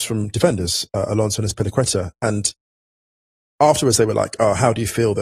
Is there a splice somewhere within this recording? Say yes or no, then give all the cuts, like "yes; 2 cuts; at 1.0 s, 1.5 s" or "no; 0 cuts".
no; 0 cuts